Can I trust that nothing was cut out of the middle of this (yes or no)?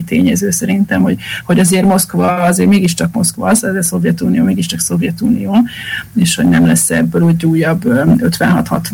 yes